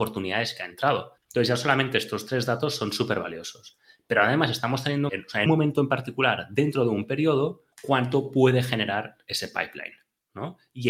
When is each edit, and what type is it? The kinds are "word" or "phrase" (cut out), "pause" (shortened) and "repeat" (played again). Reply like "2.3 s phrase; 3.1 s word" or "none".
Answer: 1.2 s pause; 5.1 s phrase; 5.5 s word; 7.7 s pause